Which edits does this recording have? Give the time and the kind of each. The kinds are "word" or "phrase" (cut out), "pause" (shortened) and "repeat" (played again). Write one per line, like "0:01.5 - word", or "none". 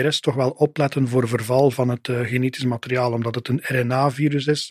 none